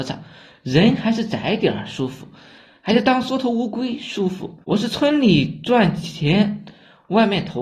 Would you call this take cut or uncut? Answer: cut